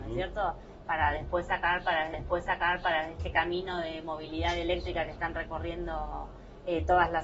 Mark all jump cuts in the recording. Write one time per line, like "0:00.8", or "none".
0:02.1